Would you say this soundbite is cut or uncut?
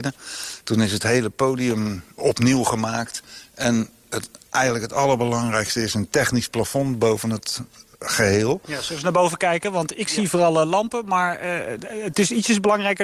cut